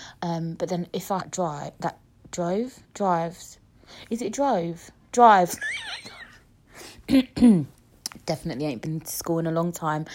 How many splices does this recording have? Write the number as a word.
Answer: two